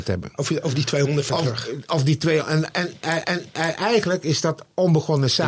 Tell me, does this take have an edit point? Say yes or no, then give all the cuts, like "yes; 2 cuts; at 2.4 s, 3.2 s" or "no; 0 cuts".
yes; 2 cuts; at 1.3 s, 3.2 s